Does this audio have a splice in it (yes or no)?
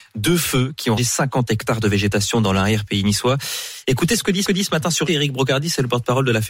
yes